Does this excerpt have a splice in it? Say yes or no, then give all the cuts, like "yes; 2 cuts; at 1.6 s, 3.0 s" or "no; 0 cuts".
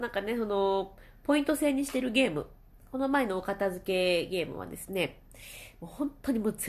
no; 0 cuts